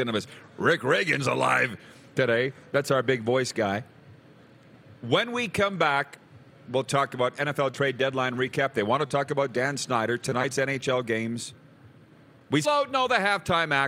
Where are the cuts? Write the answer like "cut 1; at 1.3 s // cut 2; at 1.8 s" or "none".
cut 1; at 12.6 s

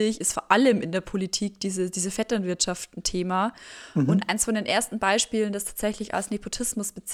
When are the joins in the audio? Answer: none

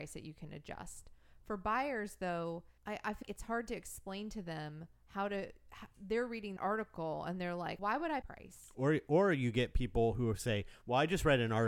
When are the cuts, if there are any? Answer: cut 1; at 2.8 s // cut 2; at 3.2 s // cut 3; at 5.0 s // cut 4; at 6.6 s // cut 5; at 7.8 s // cut 6; at 8.2 s

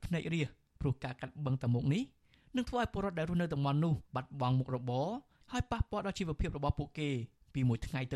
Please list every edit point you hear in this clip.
cut 1; at 4.1 s

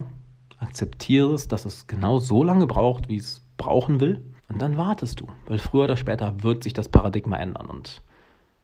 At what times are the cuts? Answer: cut 1; at 4.4 s

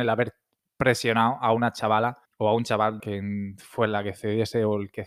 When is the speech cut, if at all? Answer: cut 1; at 2.2 s // cut 2; at 3.0 s

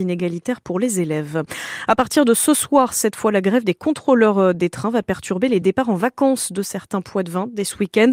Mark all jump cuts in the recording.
none

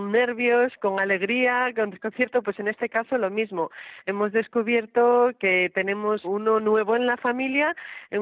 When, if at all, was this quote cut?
cut 1; at 6.2 s

